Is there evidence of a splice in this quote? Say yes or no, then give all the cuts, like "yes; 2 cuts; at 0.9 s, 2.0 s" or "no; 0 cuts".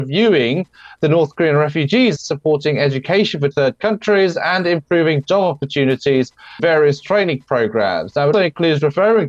yes; 4 cuts; at 2.2 s, 3.5 s, 6.6 s, 8.3 s